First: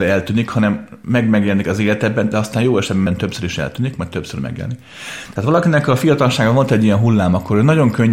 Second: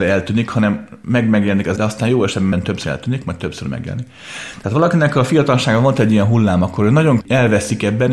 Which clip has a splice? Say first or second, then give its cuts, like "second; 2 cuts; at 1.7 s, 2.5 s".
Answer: second; 3 cuts; at 1.8 s, 2.8 s, 7.2 s